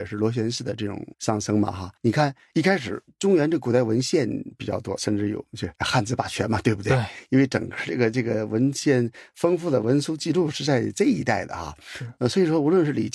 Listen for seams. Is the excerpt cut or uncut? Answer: cut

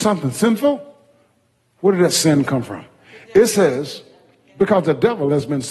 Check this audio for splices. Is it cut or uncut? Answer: uncut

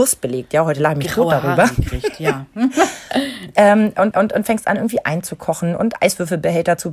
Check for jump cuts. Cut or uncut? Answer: cut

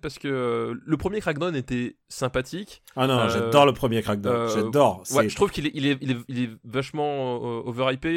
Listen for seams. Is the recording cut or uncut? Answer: uncut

